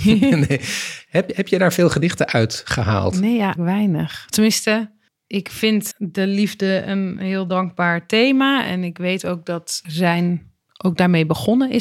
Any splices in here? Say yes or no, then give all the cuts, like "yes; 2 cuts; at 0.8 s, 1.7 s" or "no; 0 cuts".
yes; 4 cuts; at 3.6 s, 5.1 s, 5.9 s, 9.8 s